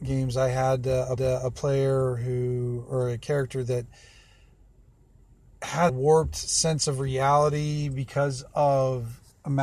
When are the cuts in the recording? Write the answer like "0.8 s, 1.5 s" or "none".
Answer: 1.2 s, 5.9 s